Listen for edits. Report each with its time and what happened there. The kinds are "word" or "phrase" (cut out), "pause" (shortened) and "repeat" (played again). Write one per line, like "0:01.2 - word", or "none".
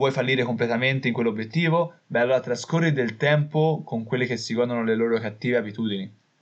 none